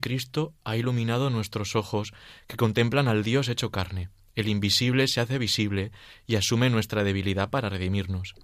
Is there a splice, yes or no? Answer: no